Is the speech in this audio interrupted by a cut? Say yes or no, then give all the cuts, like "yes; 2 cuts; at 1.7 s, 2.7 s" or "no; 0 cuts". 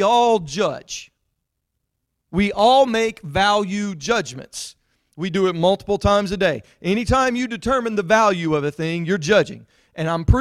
no; 0 cuts